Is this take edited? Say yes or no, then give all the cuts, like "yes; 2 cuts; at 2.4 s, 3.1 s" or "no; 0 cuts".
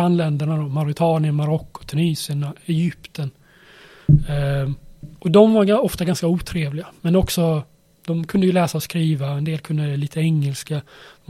yes; 1 cut; at 5.2 s